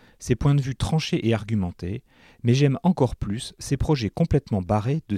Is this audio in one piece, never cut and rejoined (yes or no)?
yes